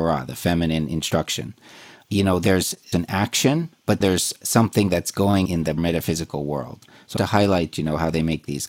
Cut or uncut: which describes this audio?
cut